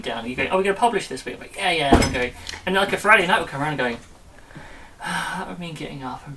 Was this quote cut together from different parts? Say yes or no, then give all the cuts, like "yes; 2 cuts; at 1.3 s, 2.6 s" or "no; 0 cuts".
no; 0 cuts